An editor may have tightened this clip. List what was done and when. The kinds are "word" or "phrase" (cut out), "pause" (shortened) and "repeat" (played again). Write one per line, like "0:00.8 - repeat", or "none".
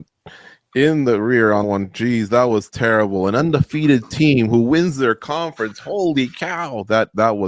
0:01.6 - word